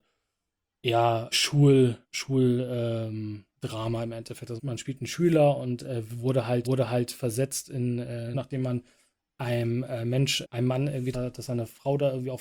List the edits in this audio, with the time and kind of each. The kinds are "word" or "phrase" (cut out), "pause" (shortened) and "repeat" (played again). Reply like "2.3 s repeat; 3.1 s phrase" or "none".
1.3 s word; 2.0 s pause; 3.6 s pause; 4.6 s word; 6.6 s repeat; 8.3 s phrase; 10.4 s word; 11.1 s phrase